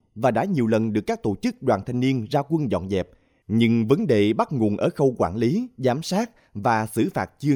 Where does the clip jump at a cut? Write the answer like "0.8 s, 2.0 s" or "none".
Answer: none